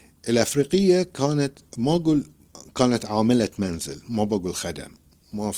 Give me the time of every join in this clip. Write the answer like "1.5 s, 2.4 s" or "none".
1.7 s